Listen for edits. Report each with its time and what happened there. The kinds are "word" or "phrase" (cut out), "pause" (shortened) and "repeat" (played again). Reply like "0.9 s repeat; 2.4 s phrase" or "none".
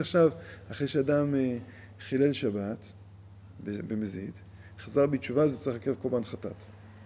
none